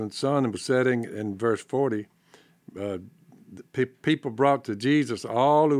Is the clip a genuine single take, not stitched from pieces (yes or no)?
yes